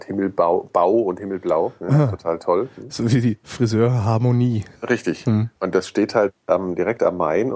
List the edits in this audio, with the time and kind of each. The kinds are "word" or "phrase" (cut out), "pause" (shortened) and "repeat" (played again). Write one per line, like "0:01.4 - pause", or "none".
0:04.8 - pause
0:05.5 - pause

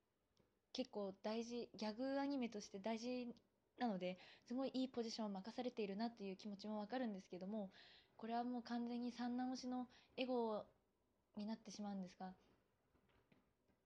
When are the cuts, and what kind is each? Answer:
none

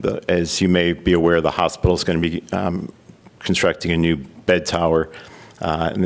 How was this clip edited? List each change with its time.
none

